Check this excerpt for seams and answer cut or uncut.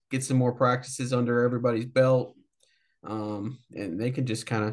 cut